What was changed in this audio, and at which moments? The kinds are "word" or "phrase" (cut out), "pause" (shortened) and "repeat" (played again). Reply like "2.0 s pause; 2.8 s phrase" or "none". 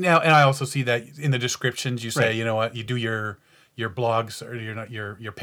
none